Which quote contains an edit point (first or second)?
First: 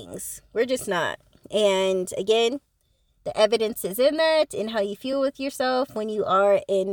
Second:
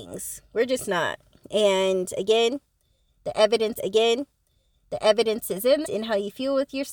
second